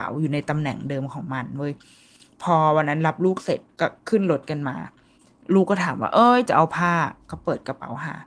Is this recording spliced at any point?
no; 0 cuts

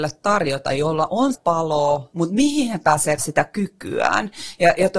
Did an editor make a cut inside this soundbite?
yes; 3 cuts; at 1.3 s, 2.1 s, 3.2 s

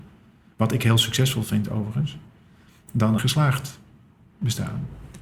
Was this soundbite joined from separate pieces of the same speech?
yes; 1 cut; at 3.2 s

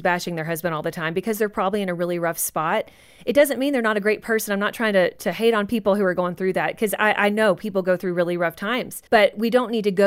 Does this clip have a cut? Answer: yes; 1 cut; at 9.1 s

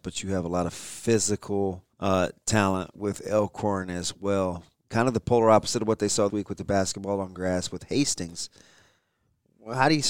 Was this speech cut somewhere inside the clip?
yes; 3 cuts; at 1.9 s, 2.9 s, 6.3 s

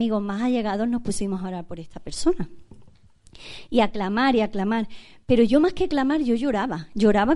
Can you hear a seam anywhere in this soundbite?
no; 0 cuts

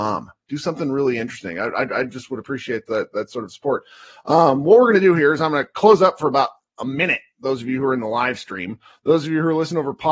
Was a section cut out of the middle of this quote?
no; 0 cuts

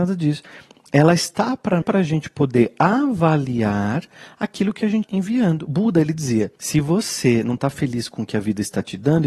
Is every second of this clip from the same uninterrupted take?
no; 3 cuts; at 1.8 s, 5.0 s, 6.6 s

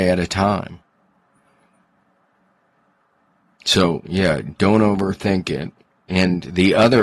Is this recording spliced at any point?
no; 0 cuts

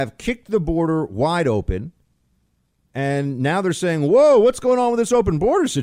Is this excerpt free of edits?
yes; 0 cuts

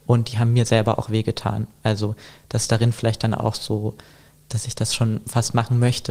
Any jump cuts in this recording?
no; 0 cuts

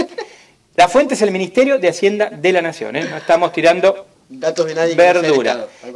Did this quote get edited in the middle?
no; 0 cuts

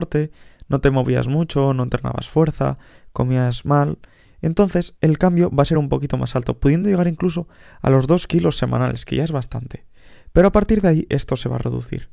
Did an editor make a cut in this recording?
no; 0 cuts

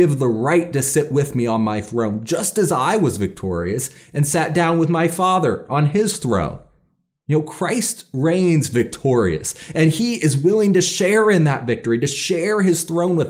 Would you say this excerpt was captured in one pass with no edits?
yes; 0 cuts

